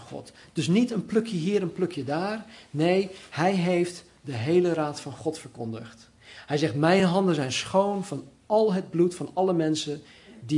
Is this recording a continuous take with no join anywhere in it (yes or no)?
yes